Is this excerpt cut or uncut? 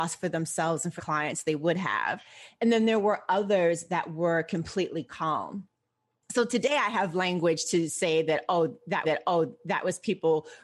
cut